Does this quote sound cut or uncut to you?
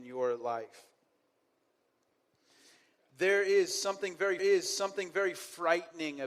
cut